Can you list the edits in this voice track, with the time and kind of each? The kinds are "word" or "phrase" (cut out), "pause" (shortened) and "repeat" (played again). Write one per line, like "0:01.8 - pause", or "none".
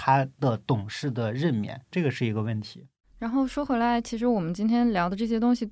0:01.8 - pause

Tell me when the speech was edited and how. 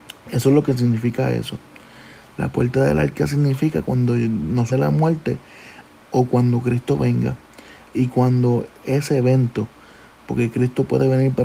0:04.7 - word
0:08.8 - word

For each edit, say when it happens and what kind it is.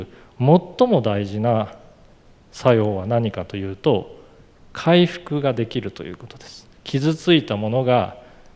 0:06.8 - pause

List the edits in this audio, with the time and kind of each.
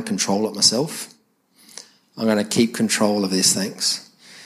none

